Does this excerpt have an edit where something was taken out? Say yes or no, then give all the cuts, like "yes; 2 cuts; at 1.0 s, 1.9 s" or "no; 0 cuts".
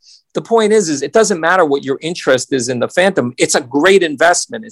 no; 0 cuts